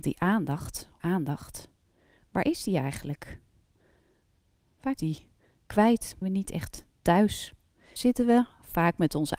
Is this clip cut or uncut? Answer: cut